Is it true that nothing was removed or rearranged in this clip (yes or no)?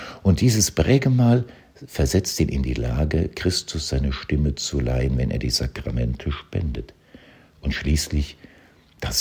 yes